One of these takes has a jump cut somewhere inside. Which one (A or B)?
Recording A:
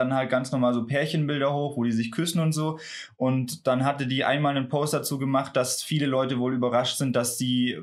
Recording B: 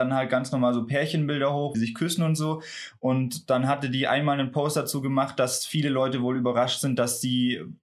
B